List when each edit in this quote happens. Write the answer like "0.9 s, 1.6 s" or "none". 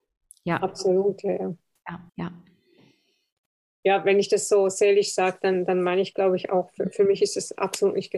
2.1 s

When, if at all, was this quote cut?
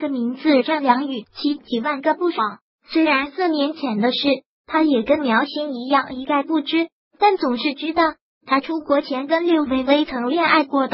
none

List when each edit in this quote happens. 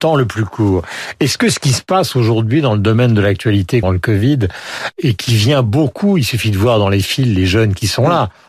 3.8 s, 4.9 s

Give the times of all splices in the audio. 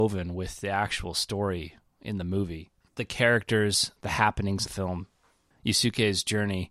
4.0 s, 4.7 s, 5.5 s

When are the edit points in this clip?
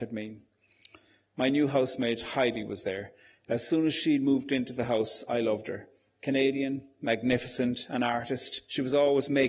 none

